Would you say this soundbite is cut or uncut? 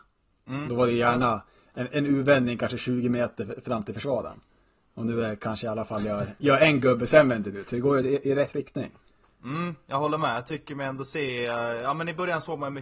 uncut